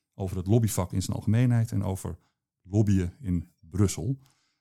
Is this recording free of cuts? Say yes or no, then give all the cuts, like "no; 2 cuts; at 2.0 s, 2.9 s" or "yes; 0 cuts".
yes; 0 cuts